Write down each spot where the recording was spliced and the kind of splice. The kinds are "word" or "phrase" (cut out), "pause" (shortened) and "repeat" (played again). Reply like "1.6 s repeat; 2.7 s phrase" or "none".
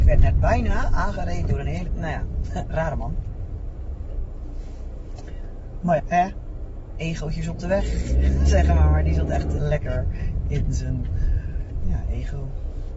1.9 s word; 6.0 s word; 9.6 s word